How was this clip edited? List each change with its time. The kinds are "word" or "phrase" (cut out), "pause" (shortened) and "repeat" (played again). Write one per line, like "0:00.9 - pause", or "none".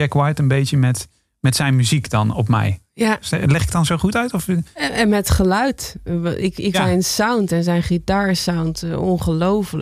0:06.7 - word